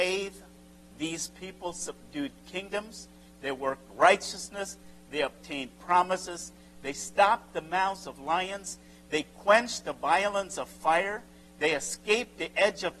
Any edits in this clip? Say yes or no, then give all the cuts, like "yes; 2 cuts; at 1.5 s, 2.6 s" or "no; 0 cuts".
no; 0 cuts